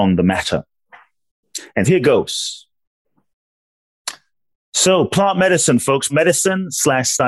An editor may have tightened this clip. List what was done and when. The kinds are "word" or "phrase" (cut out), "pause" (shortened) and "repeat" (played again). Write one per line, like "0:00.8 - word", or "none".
0:01.9 - word
0:06.1 - word

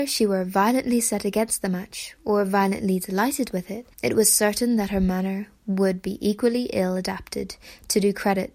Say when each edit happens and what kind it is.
0:03.9 - pause

